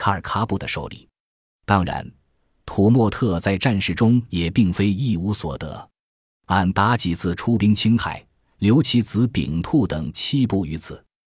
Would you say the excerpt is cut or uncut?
uncut